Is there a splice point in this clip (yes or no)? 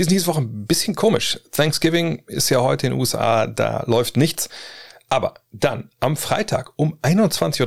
no